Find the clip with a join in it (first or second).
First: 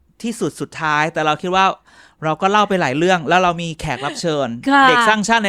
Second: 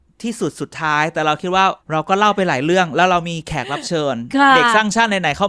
second